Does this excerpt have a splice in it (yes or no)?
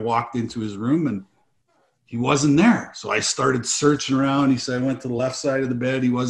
no